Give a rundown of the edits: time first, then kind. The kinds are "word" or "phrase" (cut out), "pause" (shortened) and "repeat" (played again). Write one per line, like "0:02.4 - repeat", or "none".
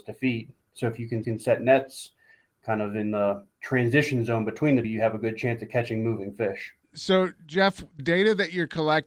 0:01.2 - repeat
0:03.5 - pause
0:04.8 - word
0:06.8 - pause
0:08.0 - word